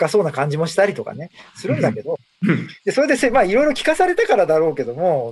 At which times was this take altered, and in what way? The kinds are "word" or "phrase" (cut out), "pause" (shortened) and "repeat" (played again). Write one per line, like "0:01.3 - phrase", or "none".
0:02.8 - pause